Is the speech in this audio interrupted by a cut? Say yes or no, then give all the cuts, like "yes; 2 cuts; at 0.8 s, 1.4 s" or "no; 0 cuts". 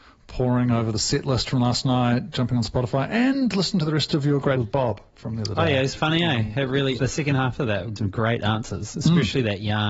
yes; 4 cuts; at 4.6 s, 6.0 s, 7.0 s, 8.0 s